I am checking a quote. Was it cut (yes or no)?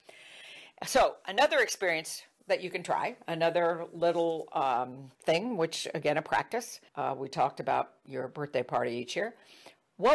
yes